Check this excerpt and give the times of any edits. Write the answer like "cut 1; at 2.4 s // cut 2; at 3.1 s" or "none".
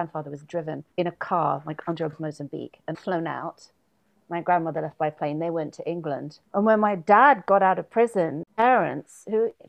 cut 1; at 0.9 s // cut 2; at 2.1 s // cut 3; at 2.9 s // cut 4; at 6.5 s